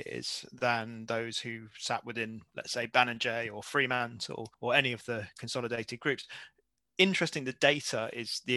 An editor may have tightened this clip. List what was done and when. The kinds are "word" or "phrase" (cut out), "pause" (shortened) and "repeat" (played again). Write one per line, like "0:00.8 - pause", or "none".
none